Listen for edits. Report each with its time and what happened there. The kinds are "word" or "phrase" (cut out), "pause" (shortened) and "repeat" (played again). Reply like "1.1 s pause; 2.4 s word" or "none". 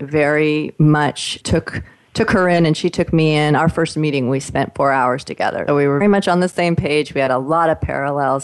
1.4 s word; 5.7 s word; 6.0 s word